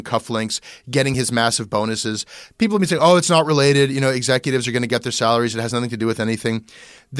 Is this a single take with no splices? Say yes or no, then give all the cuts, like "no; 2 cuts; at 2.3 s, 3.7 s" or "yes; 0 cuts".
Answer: yes; 0 cuts